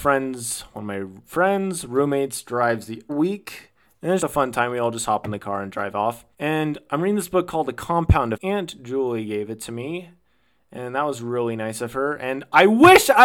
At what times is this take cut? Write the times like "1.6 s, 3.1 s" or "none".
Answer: 3.1 s, 4.2 s, 6.3 s, 8.3 s